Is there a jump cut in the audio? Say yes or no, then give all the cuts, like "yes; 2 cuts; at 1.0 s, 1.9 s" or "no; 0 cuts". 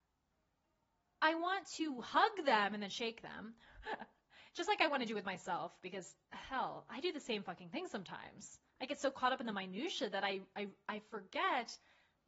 yes; 2 cuts; at 6.2 s, 8.7 s